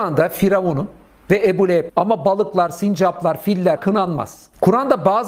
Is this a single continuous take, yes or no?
no